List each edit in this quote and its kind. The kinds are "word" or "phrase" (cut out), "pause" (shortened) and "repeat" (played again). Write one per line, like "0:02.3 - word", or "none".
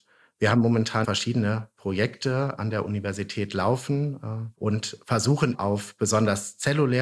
0:01.0 - word
0:02.6 - word
0:04.5 - word
0:05.5 - word